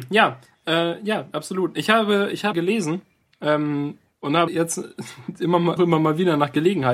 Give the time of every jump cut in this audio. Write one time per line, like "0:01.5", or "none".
0:02.5
0:04.1
0:04.5
0:05.8